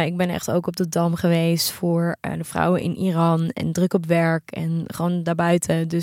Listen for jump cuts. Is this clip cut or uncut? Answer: uncut